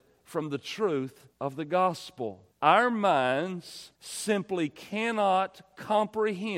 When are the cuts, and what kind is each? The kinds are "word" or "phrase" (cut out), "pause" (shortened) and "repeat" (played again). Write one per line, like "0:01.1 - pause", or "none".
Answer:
0:01.3 - pause
0:02.5 - pause
0:04.0 - pause